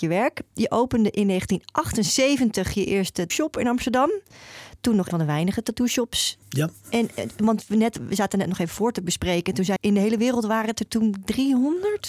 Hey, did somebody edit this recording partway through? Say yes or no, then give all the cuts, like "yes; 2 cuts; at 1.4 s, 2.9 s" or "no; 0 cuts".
yes; 4 cuts; at 3.3 s, 5.1 s, 6.4 s, 9.8 s